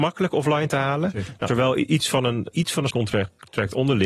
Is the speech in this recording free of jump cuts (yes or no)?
no